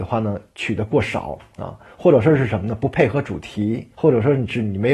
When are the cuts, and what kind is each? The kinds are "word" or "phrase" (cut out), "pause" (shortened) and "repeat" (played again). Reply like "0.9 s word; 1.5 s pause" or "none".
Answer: 3.9 s pause